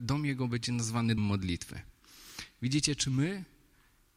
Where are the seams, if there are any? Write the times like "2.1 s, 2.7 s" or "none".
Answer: 1.2 s